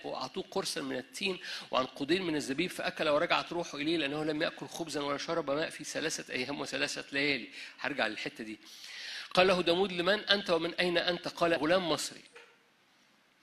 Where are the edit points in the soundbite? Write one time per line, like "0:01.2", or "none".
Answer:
0:11.6